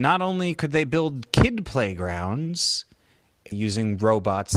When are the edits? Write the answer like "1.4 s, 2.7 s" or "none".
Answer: 3.5 s

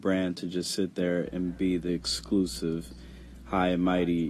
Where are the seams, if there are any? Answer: none

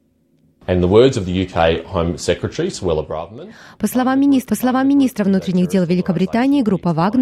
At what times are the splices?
4.5 s

